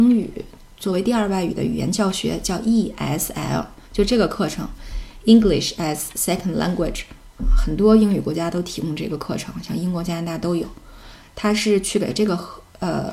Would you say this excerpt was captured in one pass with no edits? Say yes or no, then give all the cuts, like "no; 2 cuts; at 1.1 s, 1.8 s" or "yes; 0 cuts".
yes; 0 cuts